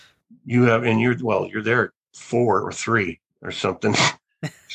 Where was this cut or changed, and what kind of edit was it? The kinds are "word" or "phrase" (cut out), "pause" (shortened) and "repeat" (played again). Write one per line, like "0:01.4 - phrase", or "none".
0:02.0 - pause
0:03.3 - pause